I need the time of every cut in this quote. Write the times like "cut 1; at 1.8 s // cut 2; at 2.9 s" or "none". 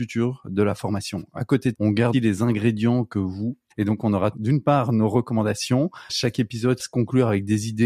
cut 1; at 1.7 s // cut 2; at 2.1 s // cut 3; at 3.7 s // cut 4; at 4.3 s // cut 5; at 6.1 s // cut 6; at 6.8 s